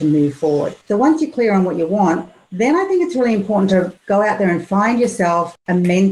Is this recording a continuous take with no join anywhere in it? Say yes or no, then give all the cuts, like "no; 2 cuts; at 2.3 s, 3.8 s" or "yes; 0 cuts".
yes; 0 cuts